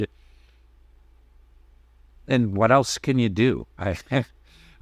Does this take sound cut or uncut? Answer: uncut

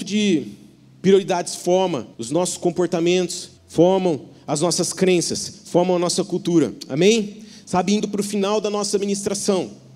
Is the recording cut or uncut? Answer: cut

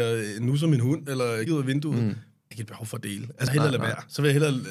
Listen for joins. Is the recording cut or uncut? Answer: cut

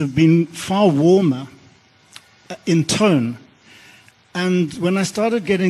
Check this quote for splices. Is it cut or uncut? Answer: uncut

